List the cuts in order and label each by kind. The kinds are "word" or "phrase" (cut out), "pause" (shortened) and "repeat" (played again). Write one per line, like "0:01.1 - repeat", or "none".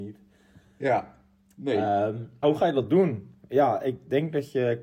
0:02.4 - word